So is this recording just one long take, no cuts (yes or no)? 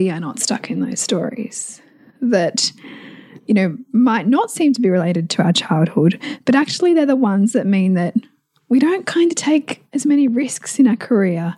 yes